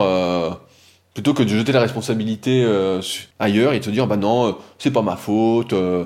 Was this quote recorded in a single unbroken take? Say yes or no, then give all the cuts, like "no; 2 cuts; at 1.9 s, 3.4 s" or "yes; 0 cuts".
no; 1 cut; at 3.3 s